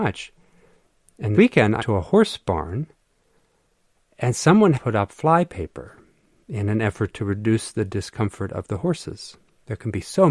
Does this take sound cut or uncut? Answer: cut